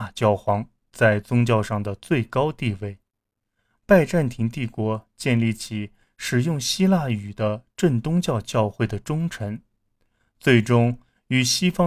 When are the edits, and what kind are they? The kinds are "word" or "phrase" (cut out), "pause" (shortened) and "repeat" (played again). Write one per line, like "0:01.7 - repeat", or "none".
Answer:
0:03.8 - phrase